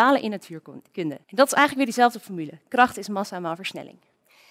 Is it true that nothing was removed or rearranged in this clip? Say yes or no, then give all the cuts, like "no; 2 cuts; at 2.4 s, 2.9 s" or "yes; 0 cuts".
no; 1 cut; at 1.2 s